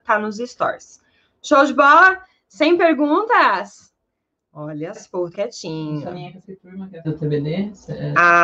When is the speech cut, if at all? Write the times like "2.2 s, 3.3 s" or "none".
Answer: 5.0 s, 5.3 s, 6.4 s, 7.0 s